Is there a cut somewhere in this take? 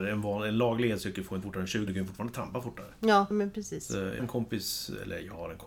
yes; 4 cuts; at 1.4 s, 1.9 s, 3.3 s, 4.2 s

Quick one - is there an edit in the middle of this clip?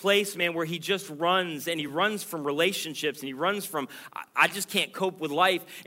no; 0 cuts

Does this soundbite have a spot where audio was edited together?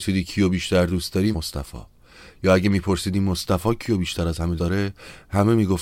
yes; 2 cuts; at 1.3 s, 4.6 s

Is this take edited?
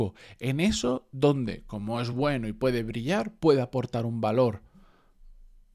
no; 0 cuts

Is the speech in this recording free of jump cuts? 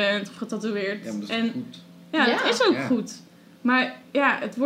yes; 0 cuts

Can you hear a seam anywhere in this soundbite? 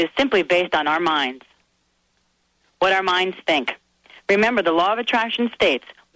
no; 0 cuts

